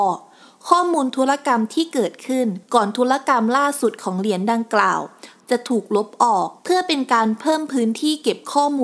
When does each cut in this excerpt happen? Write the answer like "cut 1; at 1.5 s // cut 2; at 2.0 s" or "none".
cut 1; at 2.6 s // cut 2; at 6.6 s